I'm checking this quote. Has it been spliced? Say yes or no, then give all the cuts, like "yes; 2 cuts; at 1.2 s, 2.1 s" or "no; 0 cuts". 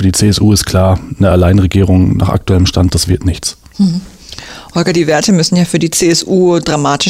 no; 0 cuts